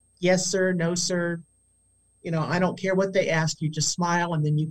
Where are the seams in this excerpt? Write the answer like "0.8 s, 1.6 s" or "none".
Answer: none